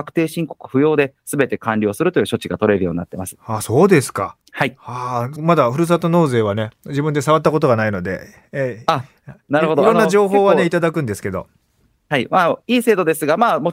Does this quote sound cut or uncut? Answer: cut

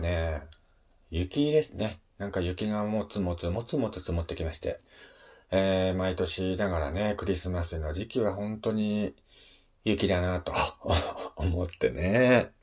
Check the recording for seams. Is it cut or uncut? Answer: uncut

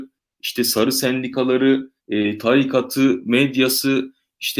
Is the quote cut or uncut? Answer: cut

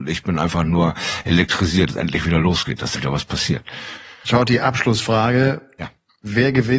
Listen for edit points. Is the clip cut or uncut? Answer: cut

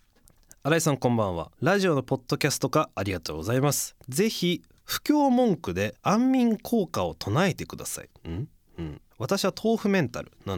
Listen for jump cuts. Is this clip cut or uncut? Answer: cut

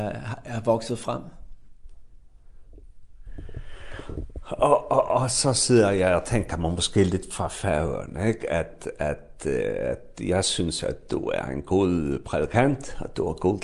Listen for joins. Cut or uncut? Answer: uncut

